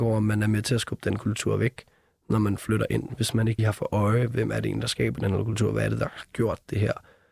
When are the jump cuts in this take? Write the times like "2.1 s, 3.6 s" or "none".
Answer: 3.6 s